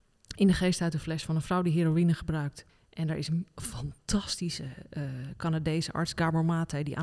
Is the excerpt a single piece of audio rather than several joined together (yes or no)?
no